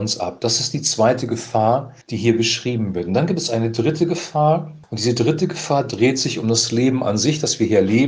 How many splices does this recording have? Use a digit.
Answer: 2